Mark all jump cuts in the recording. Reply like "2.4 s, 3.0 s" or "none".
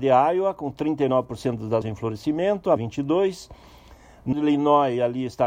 1.8 s, 2.8 s, 4.3 s